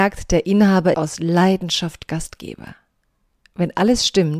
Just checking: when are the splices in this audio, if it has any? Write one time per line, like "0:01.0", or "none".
0:00.9